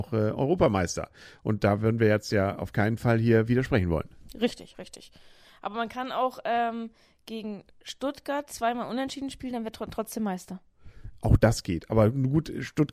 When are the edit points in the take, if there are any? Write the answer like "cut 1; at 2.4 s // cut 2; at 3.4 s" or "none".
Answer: none